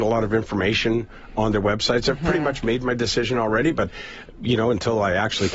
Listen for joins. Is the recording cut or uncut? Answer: uncut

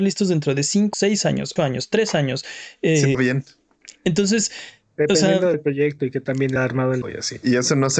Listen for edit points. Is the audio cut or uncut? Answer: cut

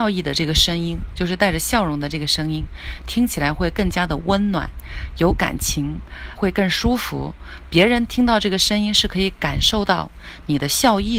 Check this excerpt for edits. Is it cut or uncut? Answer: cut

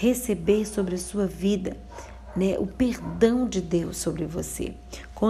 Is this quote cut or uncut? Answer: uncut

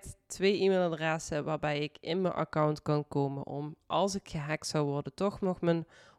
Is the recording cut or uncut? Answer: uncut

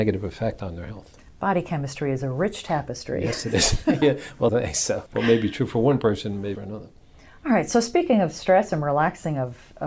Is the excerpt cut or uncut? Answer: cut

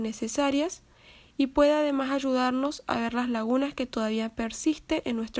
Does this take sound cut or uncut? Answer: uncut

